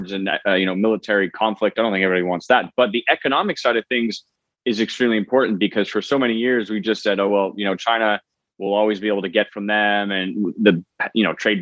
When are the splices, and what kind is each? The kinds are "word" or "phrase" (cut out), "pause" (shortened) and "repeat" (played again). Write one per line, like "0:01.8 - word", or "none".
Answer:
none

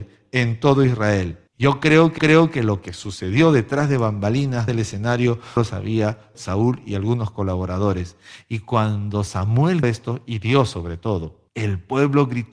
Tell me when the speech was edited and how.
0:01.5 - pause
0:02.2 - repeat
0:04.7 - word
0:05.6 - word
0:06.3 - word
0:09.8 - word
0:11.5 - pause

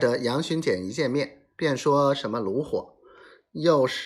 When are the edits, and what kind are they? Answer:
0:01.5 - pause

